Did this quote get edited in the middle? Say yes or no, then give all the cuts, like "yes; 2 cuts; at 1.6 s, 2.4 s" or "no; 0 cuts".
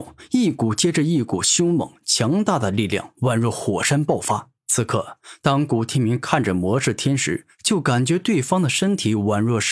yes; 1 cut; at 4.6 s